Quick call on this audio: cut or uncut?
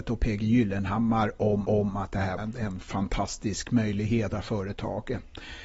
cut